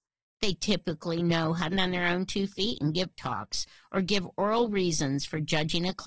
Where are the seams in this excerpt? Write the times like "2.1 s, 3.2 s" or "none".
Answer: 1.7 s, 3.1 s